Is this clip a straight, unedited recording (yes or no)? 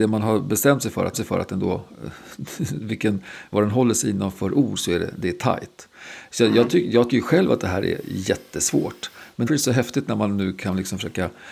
no